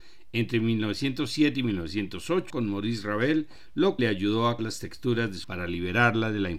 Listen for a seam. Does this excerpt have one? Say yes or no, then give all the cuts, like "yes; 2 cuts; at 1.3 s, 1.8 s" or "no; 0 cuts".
yes; 4 cuts; at 2.5 s, 4.0 s, 4.6 s, 5.4 s